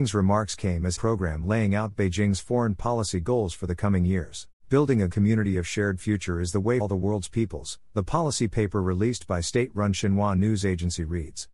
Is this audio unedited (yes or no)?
no